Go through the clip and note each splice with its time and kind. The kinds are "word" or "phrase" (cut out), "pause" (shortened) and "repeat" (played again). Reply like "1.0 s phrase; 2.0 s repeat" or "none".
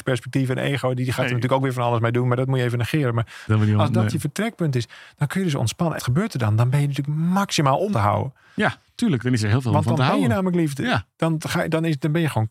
3.5 s word; 6.0 s word; 7.9 s word